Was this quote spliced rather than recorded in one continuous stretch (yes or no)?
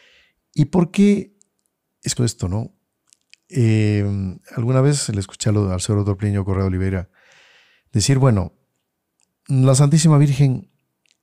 yes